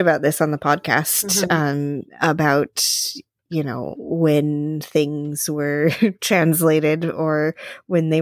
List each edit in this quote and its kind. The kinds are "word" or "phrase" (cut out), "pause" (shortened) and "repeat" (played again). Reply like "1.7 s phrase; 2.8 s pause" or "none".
2.1 s pause